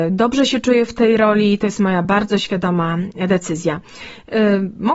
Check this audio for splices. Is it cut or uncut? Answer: uncut